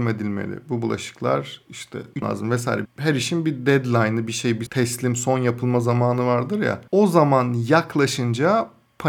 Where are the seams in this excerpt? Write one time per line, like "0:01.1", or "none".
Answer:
0:02.2
0:02.8
0:04.7

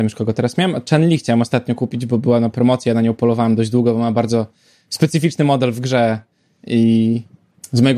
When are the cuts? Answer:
none

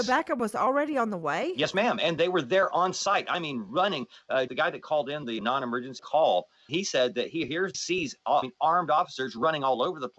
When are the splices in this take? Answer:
0:04.5
0:05.4
0:06.7
0:07.7
0:08.4

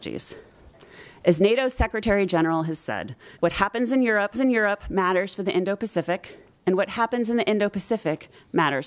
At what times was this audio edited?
0:03.3
0:04.3

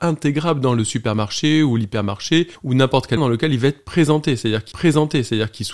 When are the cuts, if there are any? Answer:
0:02.5
0:03.2
0:04.7

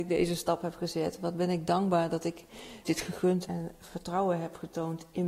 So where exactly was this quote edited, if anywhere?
0:02.8
0:03.4

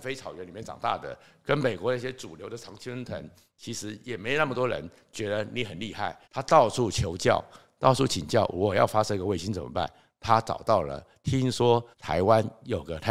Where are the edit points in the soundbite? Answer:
0:06.2
0:11.9

